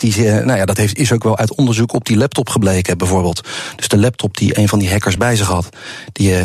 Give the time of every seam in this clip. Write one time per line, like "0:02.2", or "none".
none